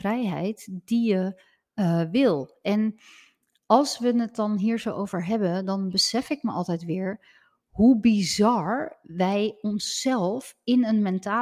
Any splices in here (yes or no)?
no